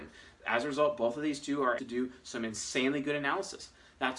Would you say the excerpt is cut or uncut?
cut